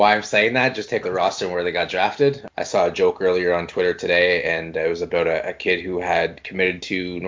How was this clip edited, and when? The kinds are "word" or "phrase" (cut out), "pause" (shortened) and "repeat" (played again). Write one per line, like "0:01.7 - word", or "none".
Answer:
0:01.0 - phrase